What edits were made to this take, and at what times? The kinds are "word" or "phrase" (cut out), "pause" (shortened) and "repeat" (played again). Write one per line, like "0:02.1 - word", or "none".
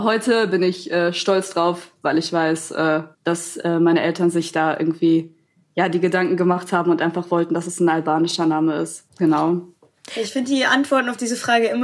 0:03.1 - pause
0:09.1 - pause

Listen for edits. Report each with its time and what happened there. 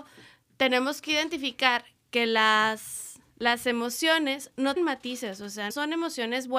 0:03.3 - pause
0:04.8 - word
0:05.7 - word

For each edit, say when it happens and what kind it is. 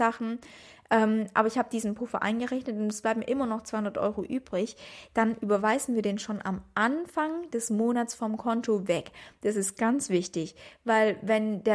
none

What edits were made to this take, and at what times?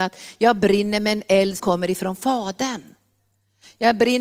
0:01.6 - word

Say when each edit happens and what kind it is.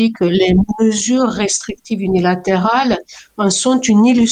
none

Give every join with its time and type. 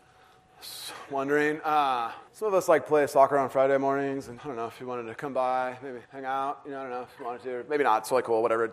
0:02.3 - pause
0:04.4 - word
0:06.0 - pause

